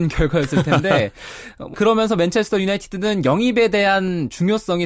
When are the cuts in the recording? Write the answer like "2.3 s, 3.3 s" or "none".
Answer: 1.7 s